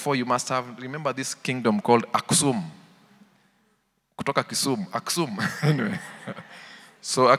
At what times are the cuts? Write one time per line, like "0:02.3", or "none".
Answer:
none